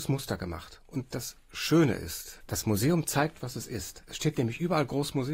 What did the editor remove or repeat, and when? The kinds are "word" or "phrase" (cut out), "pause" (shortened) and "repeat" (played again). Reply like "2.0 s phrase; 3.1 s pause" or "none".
none